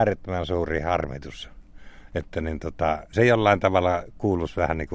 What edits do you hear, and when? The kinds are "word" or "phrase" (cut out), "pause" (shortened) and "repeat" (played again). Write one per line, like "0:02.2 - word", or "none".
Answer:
0:03.1 - word